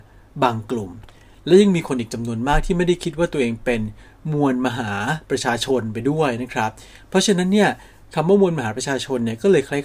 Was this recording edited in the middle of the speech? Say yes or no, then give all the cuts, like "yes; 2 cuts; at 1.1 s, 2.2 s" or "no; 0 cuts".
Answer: no; 0 cuts